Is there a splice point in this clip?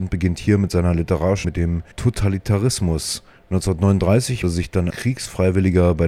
yes; 4 cuts; at 1.4 s, 1.9 s, 4.4 s, 4.9 s

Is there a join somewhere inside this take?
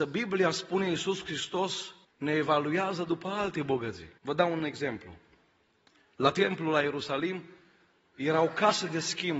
yes; 3 cuts; at 2.0 s, 4.2 s, 5.9 s

